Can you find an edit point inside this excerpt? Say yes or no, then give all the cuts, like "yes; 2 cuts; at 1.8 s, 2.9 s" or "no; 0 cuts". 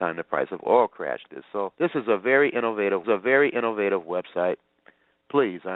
yes; 3 cuts; at 1.3 s, 1.7 s, 3.0 s